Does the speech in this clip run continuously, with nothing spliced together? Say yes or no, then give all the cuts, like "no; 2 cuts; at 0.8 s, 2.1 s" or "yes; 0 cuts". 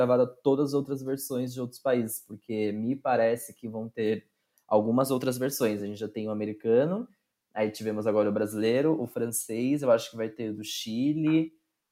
yes; 0 cuts